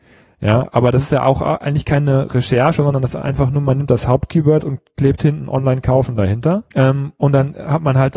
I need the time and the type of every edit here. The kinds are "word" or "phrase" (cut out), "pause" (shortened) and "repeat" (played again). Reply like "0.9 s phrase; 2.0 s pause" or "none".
6.7 s pause